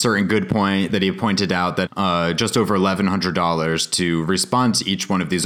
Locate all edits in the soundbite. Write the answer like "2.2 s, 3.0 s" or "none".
1.9 s

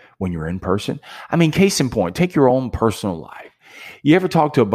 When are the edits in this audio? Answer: none

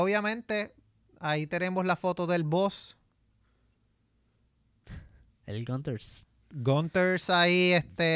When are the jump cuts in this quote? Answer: none

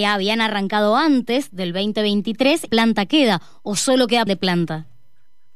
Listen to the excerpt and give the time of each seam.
2.7 s, 4.3 s

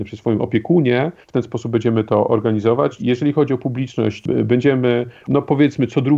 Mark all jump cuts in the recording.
1.2 s, 3.0 s, 5.3 s

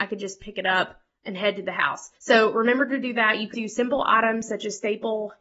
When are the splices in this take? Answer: 2.2 s, 3.5 s

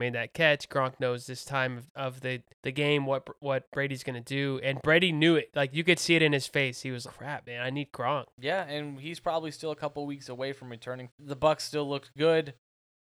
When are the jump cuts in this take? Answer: 2.5 s, 7.0 s, 8.3 s, 11.1 s

